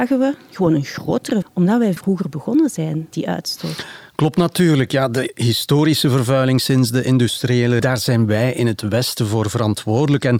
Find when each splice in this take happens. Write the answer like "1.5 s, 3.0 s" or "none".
1.4 s, 2.0 s, 3.1 s, 7.8 s